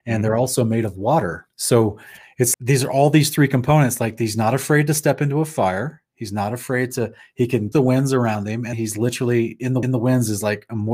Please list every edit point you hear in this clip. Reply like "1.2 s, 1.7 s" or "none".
1.5 s, 2.5 s, 7.7 s, 8.7 s, 9.8 s